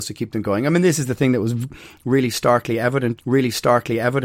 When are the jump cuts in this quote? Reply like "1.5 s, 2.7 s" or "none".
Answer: 3.2 s